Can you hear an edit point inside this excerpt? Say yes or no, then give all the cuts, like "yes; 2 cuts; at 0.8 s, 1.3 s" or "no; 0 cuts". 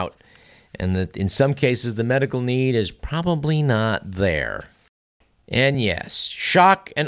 no; 0 cuts